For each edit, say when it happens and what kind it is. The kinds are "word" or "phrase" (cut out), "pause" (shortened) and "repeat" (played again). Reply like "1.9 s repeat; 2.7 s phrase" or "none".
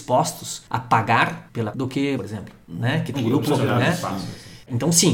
1.7 s word; 2.2 s word; 3.1 s word; 3.5 s word